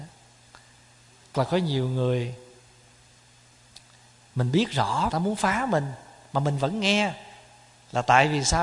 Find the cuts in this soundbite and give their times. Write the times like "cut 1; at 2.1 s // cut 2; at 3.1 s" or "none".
cut 1; at 1.3 s // cut 2; at 5.1 s